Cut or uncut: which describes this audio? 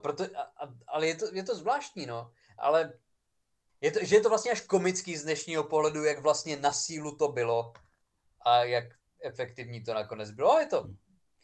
uncut